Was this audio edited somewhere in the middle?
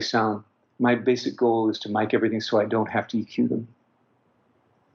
no; 0 cuts

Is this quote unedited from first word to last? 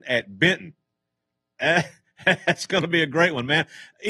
yes; 0 cuts

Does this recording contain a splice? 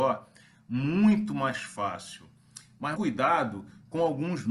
yes; 1 cut; at 2.9 s

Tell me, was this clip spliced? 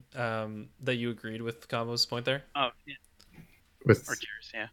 no; 0 cuts

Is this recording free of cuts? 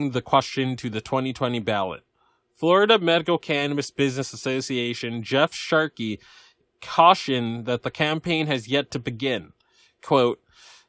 yes; 0 cuts

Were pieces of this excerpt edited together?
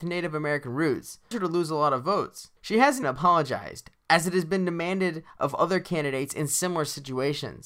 yes; 3 cuts; at 1.3 s, 2.6 s, 3.0 s

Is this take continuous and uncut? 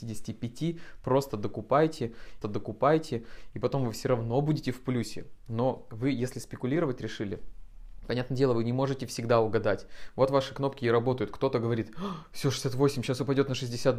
no; 1 cut; at 2.4 s

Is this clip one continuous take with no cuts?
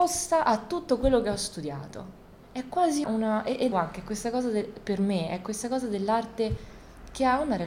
no; 3 cuts; at 2.4 s, 3.0 s, 3.7 s

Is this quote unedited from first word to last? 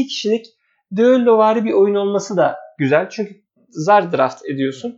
yes; 0 cuts

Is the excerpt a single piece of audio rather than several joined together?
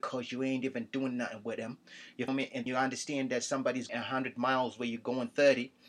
no; 3 cuts; at 2.3 s, 2.7 s, 3.9 s

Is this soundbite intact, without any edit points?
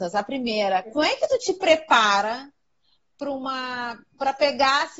no; 1 cut; at 0.9 s

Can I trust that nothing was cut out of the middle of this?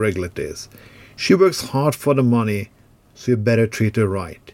yes; 0 cuts

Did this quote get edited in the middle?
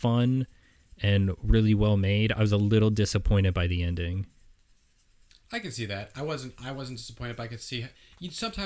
no; 0 cuts

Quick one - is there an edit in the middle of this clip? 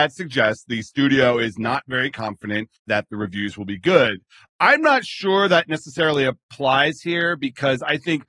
yes; 1 cut; at 2.8 s

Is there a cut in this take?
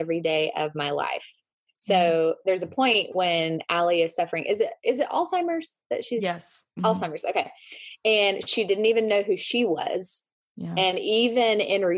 no; 0 cuts

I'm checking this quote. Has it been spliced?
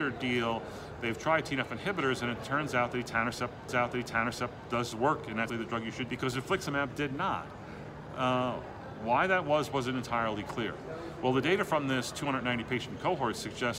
yes; 3 cuts; at 3.7 s, 5.5 s, 6.1 s

